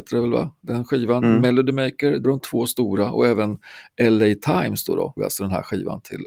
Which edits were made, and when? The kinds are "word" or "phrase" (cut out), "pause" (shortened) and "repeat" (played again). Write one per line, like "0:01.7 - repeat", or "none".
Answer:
0:02.2 - word
0:05.2 - word